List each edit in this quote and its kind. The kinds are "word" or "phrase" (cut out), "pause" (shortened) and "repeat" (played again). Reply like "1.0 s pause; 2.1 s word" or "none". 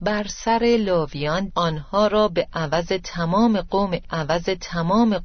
1.5 s phrase; 4.0 s repeat